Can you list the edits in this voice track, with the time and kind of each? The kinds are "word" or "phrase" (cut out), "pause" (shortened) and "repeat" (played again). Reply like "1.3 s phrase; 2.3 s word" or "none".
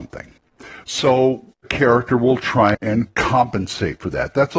1.6 s word; 2.7 s word